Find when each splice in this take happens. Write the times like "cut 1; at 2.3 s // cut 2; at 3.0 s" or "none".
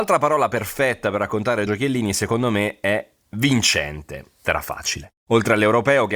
cut 1; at 1.7 s // cut 2; at 4.4 s // cut 3; at 5.2 s